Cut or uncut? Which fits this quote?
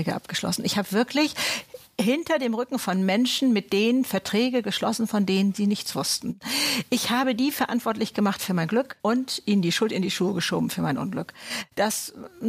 cut